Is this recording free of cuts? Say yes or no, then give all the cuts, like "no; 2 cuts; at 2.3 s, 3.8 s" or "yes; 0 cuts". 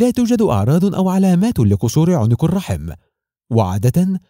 yes; 0 cuts